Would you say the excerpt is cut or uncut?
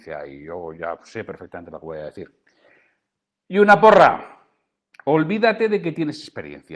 uncut